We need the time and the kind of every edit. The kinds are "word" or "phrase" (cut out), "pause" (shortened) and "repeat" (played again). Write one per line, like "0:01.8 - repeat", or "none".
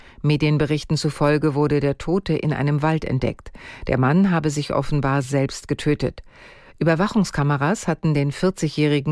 none